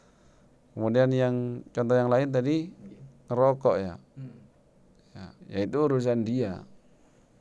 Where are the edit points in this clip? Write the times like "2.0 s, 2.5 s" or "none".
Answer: 5.4 s